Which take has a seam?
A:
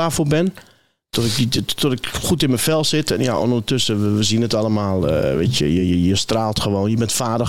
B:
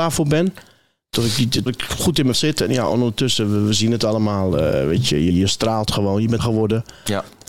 B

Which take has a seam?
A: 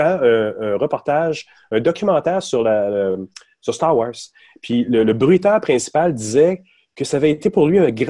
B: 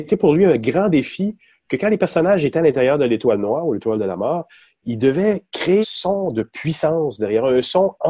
B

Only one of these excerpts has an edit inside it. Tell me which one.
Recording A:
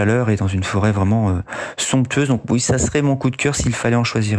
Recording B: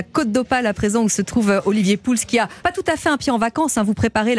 B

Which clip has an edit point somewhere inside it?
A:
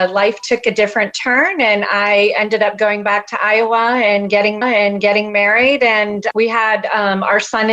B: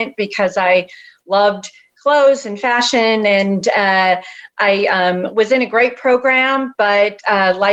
A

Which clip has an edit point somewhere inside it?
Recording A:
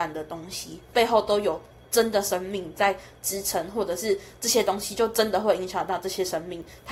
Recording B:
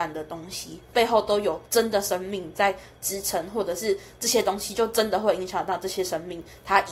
B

